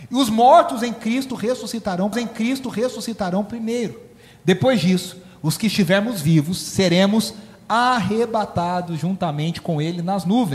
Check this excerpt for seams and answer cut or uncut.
cut